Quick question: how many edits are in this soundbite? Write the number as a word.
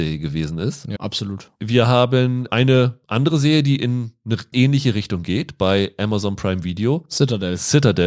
two